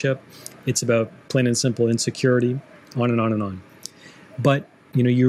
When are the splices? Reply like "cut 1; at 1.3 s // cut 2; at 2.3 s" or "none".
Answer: none